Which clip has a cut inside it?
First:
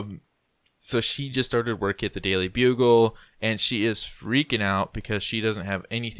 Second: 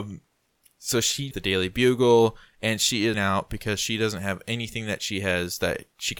second; 2 cuts; at 1.3 s, 3.1 s

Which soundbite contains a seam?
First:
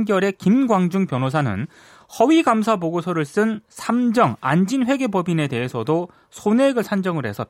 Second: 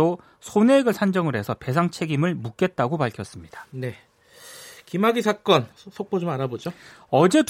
second; 1 cut; at 5.7 s

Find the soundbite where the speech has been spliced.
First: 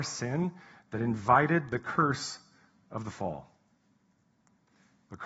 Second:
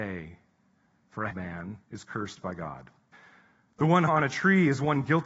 second; 4 cuts; at 1.3 s, 1.8 s, 3.1 s, 4.1 s

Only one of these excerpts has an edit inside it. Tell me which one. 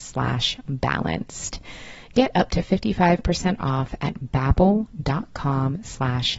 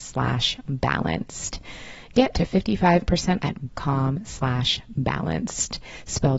second; 3 cuts; at 2.3 s, 3.4 s, 3.7 s

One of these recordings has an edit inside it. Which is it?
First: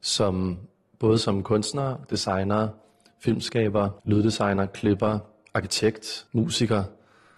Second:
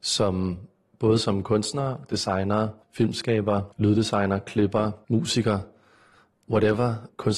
second; 2 cuts; at 2.8 s, 5.0 s

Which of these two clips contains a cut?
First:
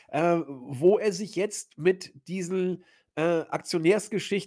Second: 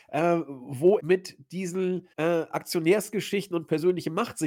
second; 2 cuts; at 1.0 s, 2.1 s

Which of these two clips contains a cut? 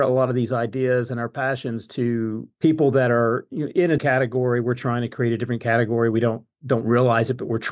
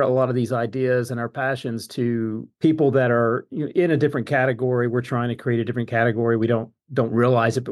first; 1 cut; at 4.0 s

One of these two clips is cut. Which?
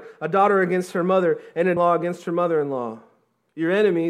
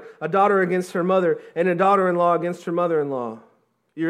first; 1 cut; at 1.8 s

